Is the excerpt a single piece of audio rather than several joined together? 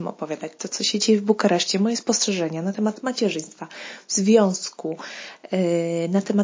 yes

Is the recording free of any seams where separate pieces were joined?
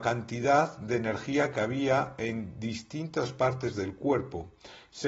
yes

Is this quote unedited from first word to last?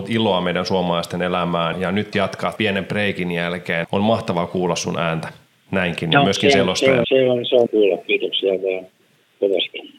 no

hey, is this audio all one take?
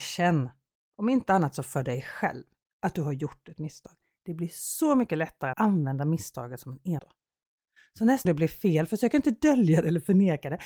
no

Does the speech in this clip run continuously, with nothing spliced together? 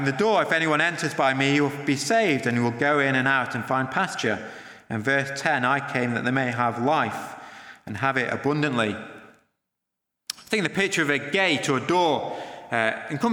yes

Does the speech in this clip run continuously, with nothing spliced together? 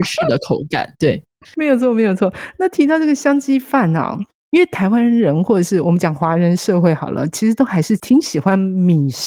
yes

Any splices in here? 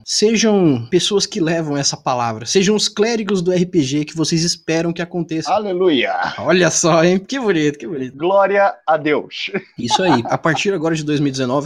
no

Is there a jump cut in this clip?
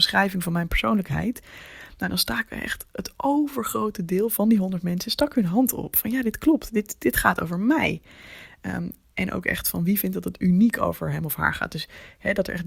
no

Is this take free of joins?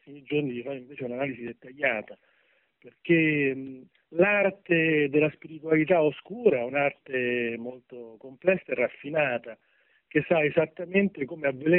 yes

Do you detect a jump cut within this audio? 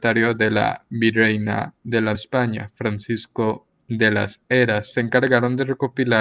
yes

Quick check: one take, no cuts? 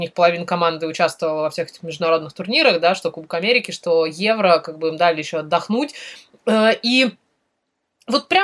yes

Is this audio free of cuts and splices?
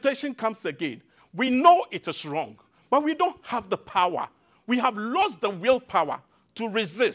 yes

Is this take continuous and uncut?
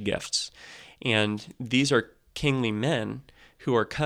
yes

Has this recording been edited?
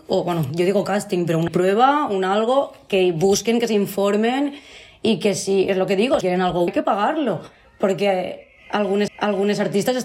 yes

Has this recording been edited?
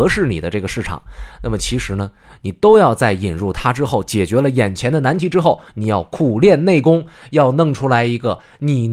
no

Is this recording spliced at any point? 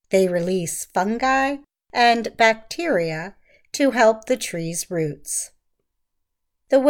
no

